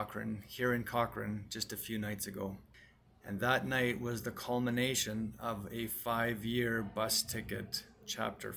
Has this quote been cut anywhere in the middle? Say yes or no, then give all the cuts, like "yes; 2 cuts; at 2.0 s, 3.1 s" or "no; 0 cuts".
no; 0 cuts